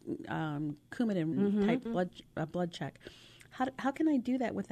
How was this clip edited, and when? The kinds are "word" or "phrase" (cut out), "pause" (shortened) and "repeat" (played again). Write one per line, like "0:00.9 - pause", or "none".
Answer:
0:01.3 - word
0:01.9 - word